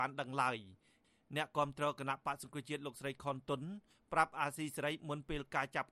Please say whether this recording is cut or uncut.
uncut